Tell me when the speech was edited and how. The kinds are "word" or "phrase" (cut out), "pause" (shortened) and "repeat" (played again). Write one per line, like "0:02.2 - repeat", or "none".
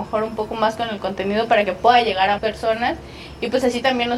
0:02.4 - word

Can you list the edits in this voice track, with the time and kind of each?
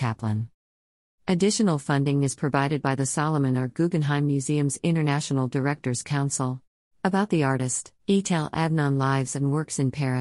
0:06.7 - pause
0:08.0 - pause

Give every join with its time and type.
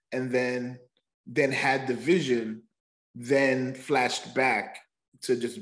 none

